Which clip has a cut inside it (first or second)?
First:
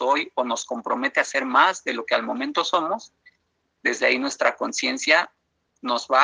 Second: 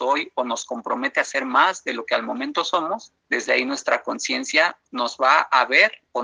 second